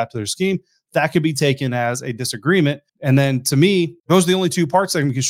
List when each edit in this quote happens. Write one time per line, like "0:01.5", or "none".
0:02.9
0:04.0